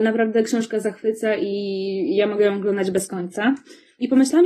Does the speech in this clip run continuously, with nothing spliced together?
yes; 0 cuts

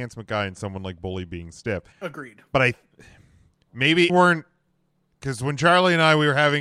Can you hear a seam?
yes; 2 cuts; at 1.9 s, 4.1 s

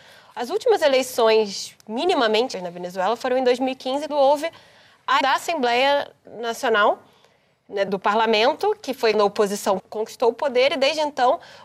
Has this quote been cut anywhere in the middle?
yes; 6 cuts; at 2.5 s, 4.1 s, 5.2 s, 7.9 s, 9.1 s, 9.8 s

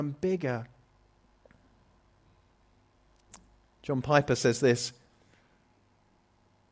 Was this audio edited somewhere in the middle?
no; 0 cuts

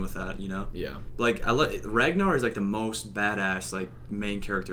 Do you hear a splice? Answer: no; 0 cuts

